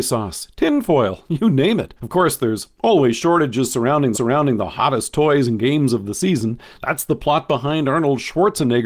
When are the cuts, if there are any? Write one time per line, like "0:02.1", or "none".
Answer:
0:02.0
0:04.1